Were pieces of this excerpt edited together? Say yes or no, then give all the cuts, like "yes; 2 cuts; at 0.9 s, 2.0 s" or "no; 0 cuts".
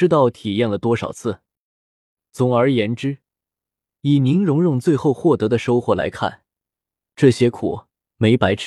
no; 0 cuts